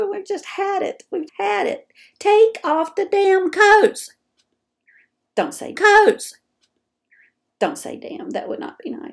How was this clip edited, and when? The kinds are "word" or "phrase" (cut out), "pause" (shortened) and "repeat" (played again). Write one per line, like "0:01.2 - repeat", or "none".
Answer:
0:01.3 - word
0:05.8 - repeat